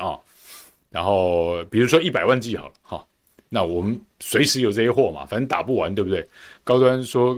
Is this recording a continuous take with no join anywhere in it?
yes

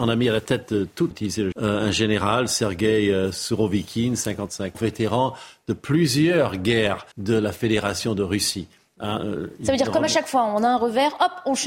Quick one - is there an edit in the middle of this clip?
yes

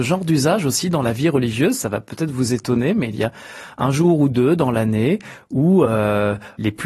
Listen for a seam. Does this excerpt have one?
no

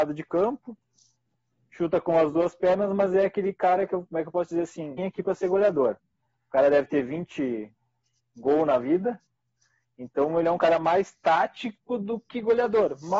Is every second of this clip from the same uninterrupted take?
no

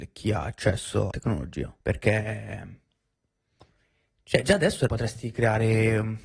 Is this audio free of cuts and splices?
no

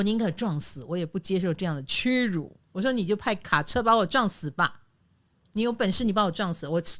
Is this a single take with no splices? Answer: no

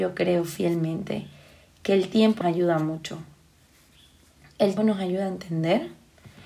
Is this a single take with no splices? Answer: no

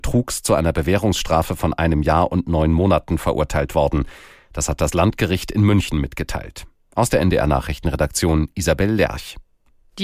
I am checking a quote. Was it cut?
no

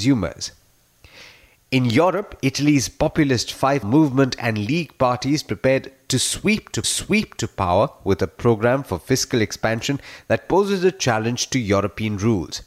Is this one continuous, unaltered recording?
no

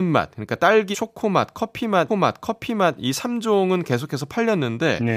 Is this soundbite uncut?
no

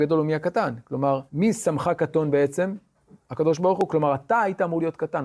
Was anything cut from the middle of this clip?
yes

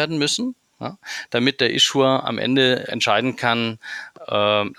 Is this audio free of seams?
no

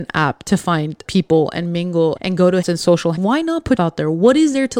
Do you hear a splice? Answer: yes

